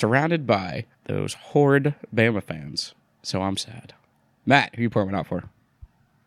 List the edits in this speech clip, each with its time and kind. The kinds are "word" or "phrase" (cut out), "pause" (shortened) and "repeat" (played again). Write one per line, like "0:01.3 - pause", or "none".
0:00.9 - pause
0:03.1 - pause
0:04.1 - pause

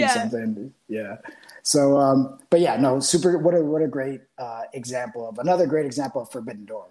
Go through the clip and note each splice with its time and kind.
none

